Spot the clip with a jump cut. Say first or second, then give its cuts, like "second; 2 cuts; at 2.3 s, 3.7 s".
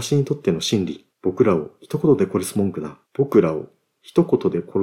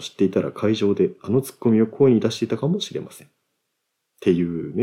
first; 2 cuts; at 1.1 s, 3.0 s